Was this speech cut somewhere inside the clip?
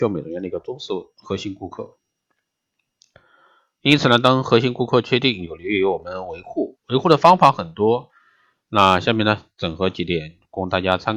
no; 0 cuts

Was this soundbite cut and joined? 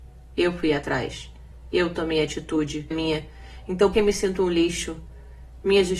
yes; 2 cuts; at 2.9 s, 3.9 s

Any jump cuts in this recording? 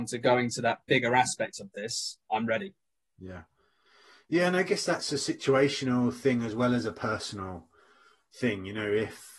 no; 0 cuts

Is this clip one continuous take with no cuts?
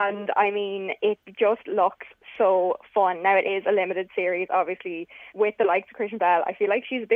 no; 1 cut; at 5.3 s

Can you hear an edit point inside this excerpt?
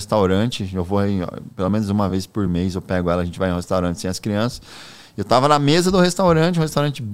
no; 0 cuts

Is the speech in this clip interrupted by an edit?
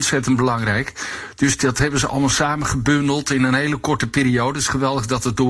no; 0 cuts

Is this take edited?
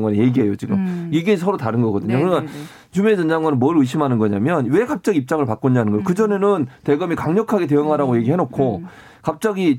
no; 0 cuts

